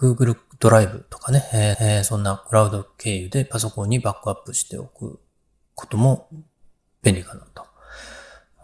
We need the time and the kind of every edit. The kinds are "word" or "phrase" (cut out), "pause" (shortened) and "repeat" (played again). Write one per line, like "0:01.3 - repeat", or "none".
0:01.7 - repeat